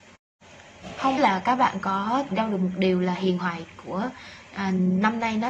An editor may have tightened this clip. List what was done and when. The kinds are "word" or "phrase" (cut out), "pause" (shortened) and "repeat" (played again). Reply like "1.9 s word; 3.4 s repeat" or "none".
1.2 s word; 2.3 s word